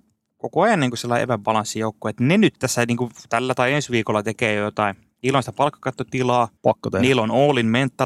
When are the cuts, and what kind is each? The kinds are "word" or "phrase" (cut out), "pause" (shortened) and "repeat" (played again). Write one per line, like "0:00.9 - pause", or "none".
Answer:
0:06.6 - pause